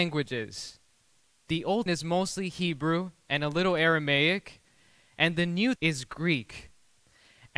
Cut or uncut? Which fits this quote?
cut